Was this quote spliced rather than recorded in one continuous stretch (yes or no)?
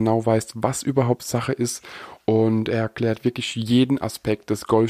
no